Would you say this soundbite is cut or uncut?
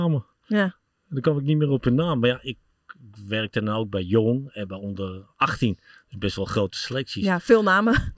uncut